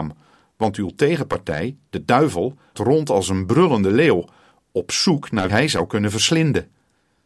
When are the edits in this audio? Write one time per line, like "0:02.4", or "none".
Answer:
0:02.7
0:05.5